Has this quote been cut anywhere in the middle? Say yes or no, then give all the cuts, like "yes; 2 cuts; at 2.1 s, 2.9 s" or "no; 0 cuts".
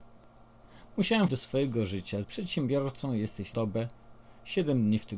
yes; 3 cuts; at 1.3 s, 2.2 s, 3.5 s